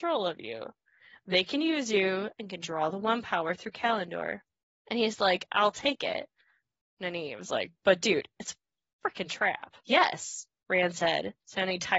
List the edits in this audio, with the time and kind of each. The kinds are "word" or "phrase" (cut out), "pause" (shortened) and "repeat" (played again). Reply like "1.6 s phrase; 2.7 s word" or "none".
4.6 s pause; 9.8 s pause

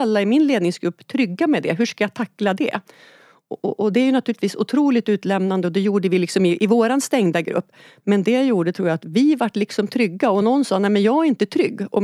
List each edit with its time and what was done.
none

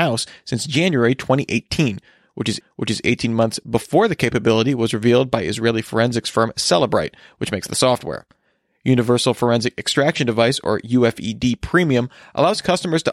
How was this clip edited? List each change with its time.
2.6 s repeat

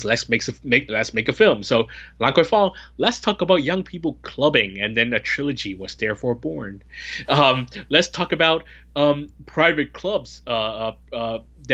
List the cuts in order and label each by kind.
none

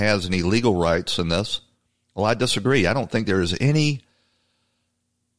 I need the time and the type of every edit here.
none

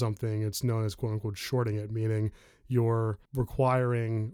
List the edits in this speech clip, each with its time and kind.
3.2 s pause

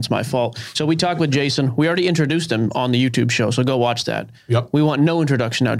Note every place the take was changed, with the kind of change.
none

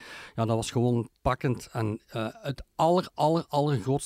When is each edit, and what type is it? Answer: none

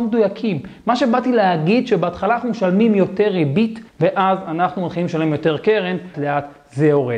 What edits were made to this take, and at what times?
3.9 s pause; 6.1 s word

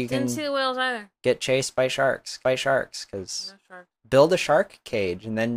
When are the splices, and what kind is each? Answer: 1.2 s pause; 2.4 s repeat; 4.0 s pause

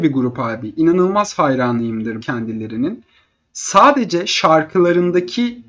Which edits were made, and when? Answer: 2.2 s word

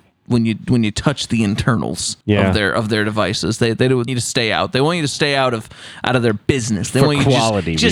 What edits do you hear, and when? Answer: 2.2 s pause; 4.1 s word

